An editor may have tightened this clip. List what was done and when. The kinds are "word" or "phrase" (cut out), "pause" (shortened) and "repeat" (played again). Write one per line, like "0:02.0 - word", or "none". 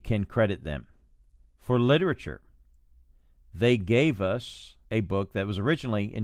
0:04.8 - pause